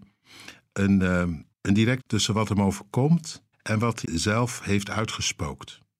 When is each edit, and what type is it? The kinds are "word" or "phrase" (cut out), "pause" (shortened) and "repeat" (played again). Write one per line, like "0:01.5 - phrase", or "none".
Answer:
0:01.5 - pause
0:02.0 - word
0:03.5 - pause
0:04.0 - word